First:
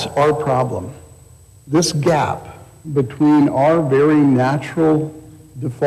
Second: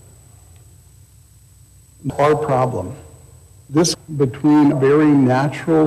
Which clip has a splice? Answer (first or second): second